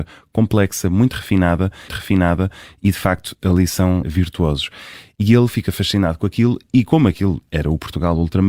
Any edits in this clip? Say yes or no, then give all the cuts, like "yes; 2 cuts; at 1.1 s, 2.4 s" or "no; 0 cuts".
yes; 2 cuts; at 1.9 s, 4.0 s